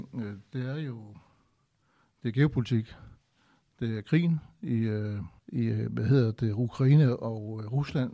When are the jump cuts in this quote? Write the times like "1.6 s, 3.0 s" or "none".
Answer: 5.4 s

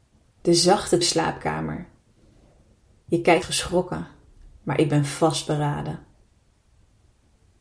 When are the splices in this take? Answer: 1.0 s, 3.4 s

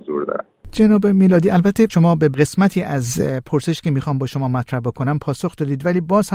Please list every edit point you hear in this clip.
1.9 s

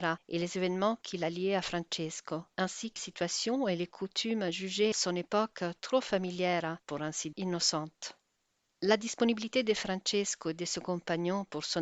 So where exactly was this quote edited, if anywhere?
2.5 s, 3.0 s, 4.9 s, 6.8 s, 7.3 s

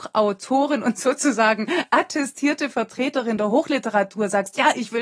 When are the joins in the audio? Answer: none

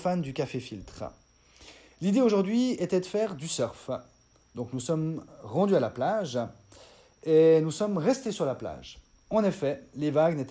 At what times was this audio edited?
none

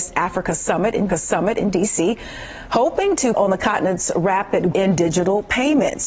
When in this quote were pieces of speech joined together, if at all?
1.1 s, 3.3 s, 4.7 s

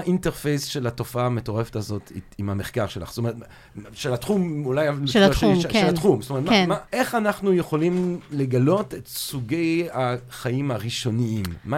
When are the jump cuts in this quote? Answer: 6.9 s

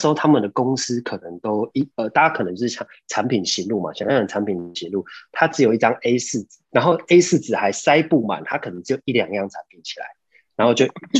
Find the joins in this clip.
1.9 s, 6.6 s

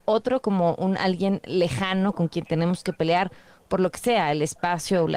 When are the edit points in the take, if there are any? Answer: none

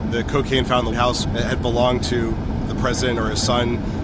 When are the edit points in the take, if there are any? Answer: 0.9 s, 1.2 s, 2.7 s

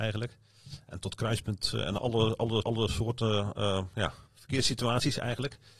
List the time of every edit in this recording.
2.0 s, 2.6 s, 4.3 s

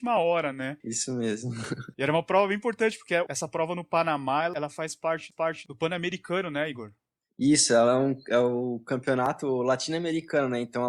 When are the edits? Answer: 5.3 s

